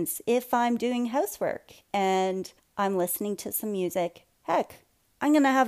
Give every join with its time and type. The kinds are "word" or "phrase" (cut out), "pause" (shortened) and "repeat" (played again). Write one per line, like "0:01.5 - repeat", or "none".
0:02.6 - pause
0:04.3 - pause